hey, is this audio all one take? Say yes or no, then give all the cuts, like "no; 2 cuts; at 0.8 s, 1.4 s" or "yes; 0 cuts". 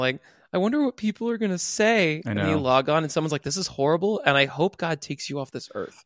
yes; 0 cuts